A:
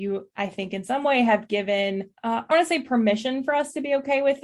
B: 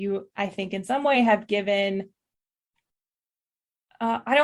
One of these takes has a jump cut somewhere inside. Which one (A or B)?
A